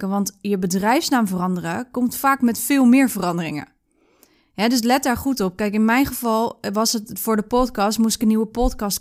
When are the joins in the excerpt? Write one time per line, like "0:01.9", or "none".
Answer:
none